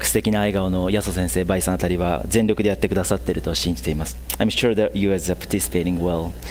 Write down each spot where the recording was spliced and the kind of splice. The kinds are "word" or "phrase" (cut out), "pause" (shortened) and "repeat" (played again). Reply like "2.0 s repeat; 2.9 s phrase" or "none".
none

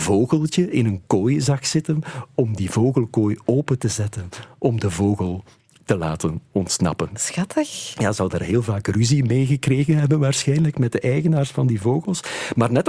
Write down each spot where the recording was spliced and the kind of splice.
none

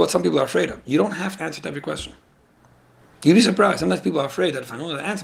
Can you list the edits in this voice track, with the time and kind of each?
1.4 s phrase

